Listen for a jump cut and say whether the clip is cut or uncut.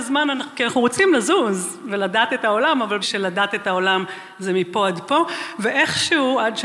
cut